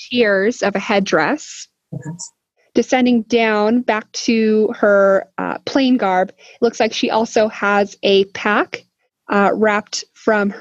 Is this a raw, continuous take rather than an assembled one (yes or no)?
yes